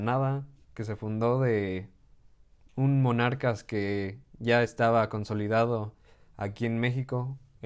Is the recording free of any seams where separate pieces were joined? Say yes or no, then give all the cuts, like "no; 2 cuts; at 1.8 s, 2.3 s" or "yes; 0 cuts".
yes; 0 cuts